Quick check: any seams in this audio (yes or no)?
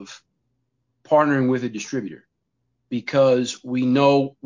no